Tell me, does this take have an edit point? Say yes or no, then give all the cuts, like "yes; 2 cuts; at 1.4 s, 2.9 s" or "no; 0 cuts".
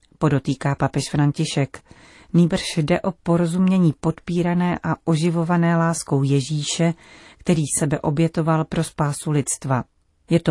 yes; 1 cut; at 7.8 s